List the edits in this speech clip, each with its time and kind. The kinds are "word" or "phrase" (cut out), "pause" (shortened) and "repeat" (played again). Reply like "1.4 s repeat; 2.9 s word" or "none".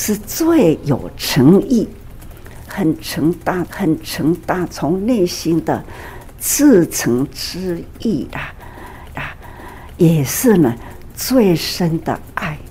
3.7 s repeat; 9.2 s repeat